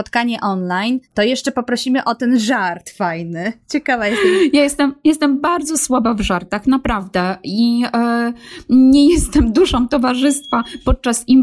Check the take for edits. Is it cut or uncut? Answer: cut